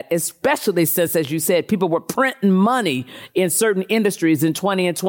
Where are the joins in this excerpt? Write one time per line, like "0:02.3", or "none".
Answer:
none